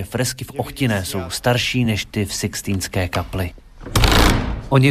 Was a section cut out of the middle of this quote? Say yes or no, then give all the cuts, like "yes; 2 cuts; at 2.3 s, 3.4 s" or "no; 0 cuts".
no; 0 cuts